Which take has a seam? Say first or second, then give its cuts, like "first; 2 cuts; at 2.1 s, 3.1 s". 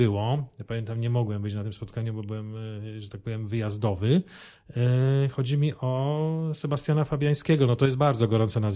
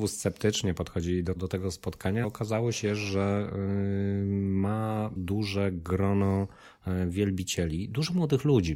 second; 3 cuts; at 1.4 s, 2.2 s, 5.2 s